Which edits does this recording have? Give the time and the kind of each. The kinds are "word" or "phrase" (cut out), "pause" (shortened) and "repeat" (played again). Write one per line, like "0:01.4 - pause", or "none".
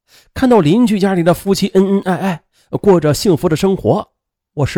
none